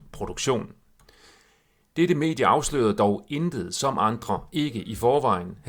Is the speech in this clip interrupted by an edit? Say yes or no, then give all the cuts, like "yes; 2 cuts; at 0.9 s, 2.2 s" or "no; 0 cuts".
no; 0 cuts